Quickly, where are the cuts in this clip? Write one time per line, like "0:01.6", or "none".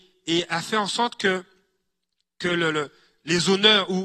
none